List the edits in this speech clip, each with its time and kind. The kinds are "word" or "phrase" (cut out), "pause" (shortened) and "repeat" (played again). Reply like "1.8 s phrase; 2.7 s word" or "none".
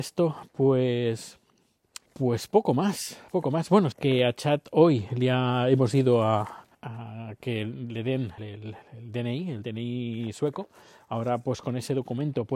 2.1 s pause; 3.3 s pause; 3.9 s word; 6.7 s pause; 8.4 s word; 8.8 s pause